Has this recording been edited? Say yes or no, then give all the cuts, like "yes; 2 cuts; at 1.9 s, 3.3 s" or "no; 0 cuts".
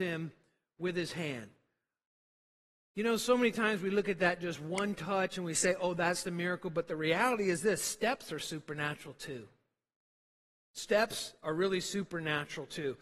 no; 0 cuts